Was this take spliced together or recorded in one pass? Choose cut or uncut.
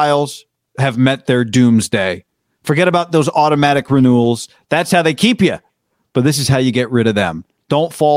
uncut